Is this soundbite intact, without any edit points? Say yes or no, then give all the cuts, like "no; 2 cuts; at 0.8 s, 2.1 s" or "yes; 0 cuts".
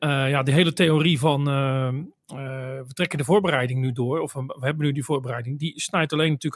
yes; 0 cuts